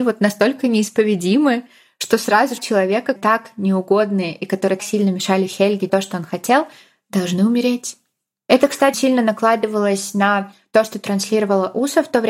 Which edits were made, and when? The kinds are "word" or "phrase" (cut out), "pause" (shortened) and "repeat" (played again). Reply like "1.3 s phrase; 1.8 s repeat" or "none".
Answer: 2.6 s word; 3.2 s word; 4.8 s word; 5.9 s word; 8.9 s word